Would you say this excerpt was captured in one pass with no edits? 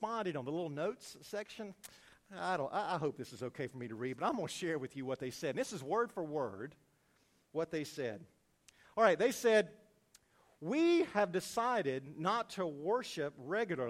yes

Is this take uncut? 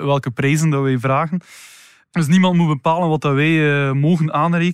yes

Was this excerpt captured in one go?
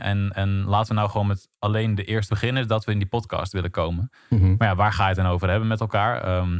no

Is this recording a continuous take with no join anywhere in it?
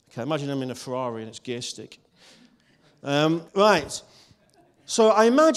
no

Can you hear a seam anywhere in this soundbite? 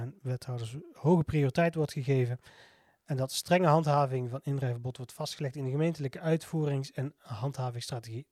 no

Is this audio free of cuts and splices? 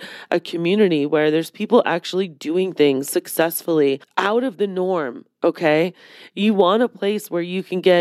yes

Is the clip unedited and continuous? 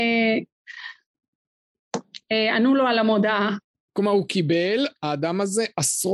yes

